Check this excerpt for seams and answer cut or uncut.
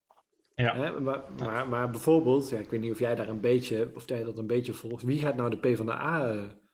uncut